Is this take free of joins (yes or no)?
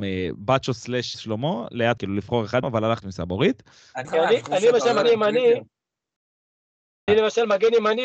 no